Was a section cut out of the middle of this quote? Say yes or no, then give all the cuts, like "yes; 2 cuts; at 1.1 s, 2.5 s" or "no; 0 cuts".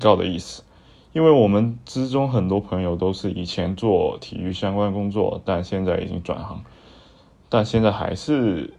no; 0 cuts